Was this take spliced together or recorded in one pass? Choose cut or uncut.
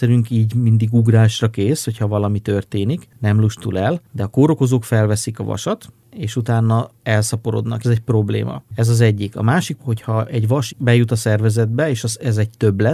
cut